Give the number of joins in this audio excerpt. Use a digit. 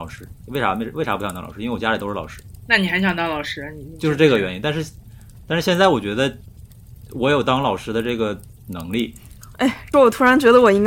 1